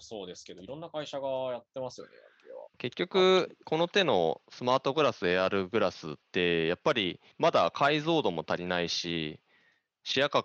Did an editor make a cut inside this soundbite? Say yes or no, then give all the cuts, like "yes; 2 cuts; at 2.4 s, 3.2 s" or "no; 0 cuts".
yes; 4 cuts; at 2.7 s, 3.6 s, 6.2 s, 7.3 s